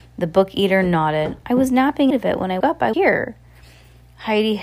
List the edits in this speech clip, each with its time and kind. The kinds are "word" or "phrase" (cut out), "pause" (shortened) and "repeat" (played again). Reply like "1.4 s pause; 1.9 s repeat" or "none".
2.1 s word; 2.6 s word; 2.9 s word